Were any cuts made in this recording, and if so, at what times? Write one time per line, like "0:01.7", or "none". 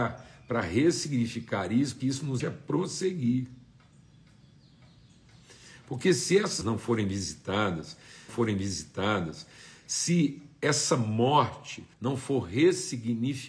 0:02.0
0:02.4
0:06.6
0:08.3
0:11.9